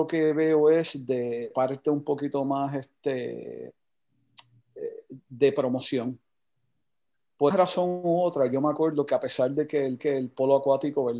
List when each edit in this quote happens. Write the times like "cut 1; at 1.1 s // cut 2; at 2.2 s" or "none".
cut 1; at 1.5 s // cut 2; at 7.5 s // cut 3; at 10.0 s